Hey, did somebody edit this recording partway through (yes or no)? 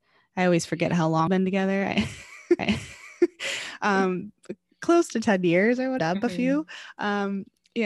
yes